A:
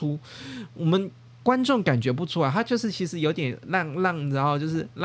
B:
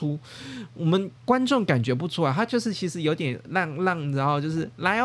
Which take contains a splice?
B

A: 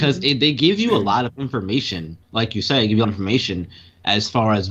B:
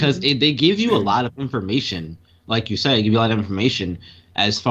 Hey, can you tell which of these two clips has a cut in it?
A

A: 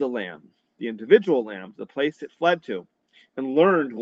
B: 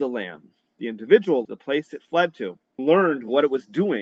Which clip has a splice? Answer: B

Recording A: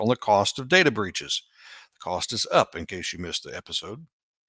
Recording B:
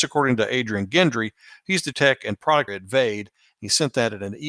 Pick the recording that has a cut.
B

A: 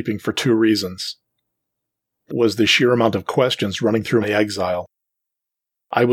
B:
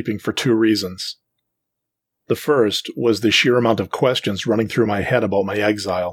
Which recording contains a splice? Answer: A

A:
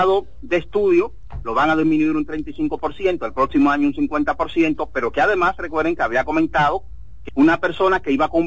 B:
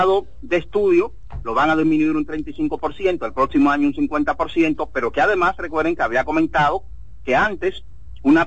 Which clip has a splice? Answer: A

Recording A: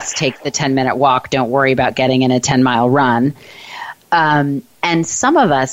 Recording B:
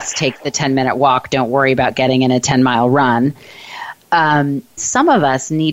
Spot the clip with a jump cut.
B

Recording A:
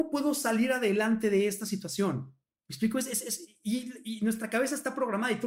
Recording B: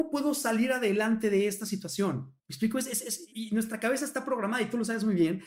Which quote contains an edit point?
B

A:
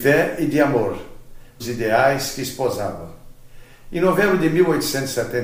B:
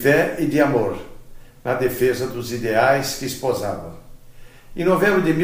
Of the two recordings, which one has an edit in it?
A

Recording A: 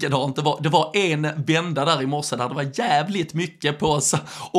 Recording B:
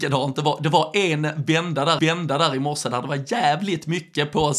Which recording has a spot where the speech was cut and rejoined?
B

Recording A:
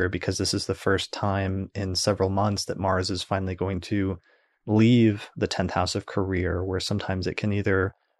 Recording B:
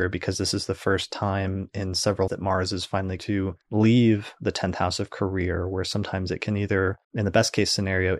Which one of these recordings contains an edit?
B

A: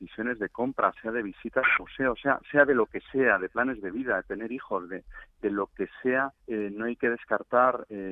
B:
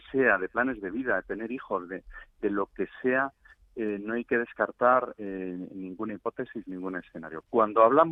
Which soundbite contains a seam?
A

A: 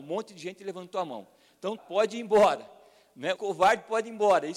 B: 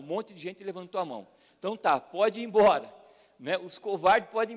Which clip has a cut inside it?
A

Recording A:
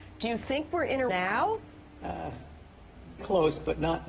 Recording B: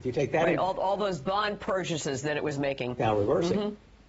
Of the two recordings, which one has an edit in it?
A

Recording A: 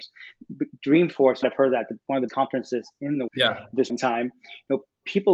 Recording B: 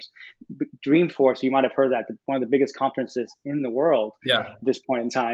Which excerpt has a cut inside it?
A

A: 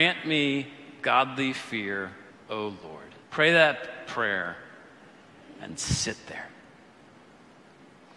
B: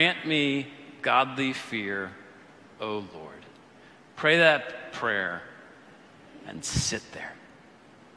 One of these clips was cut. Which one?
A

